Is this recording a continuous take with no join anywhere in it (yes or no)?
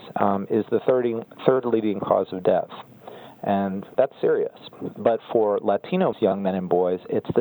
no